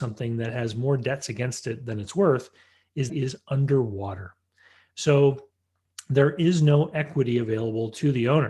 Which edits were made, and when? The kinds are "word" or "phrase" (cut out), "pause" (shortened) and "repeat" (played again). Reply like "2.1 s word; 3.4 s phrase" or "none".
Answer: 3.1 s phrase

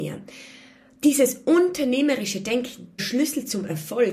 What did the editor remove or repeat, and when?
3.0 s phrase

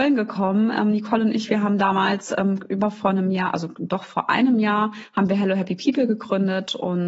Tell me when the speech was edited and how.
none

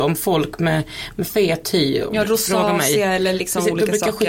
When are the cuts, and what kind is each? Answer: none

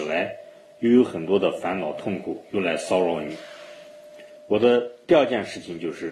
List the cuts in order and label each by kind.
4.4 s pause

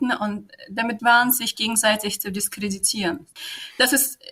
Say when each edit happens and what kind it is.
1.0 s word

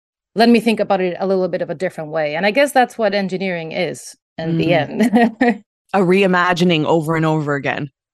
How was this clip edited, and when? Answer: none

